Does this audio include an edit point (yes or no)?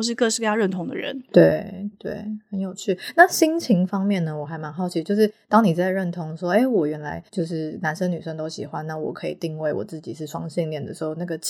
yes